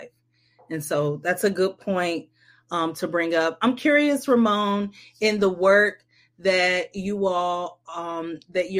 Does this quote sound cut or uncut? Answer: uncut